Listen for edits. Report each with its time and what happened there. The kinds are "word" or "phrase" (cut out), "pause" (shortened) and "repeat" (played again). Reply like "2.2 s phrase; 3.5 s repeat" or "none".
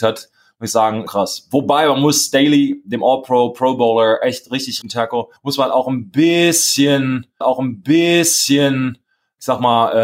1.1 s word; 4.8 s phrase; 5.4 s pause; 7.4 s repeat